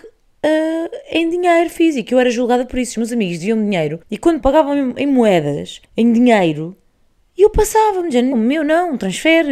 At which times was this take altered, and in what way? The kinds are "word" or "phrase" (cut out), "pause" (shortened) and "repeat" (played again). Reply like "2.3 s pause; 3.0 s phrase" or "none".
4.0 s pause; 4.4 s word; 5.8 s pause; 8.3 s word